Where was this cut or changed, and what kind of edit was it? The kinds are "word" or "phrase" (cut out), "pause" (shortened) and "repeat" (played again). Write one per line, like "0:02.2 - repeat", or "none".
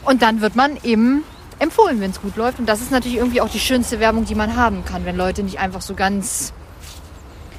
none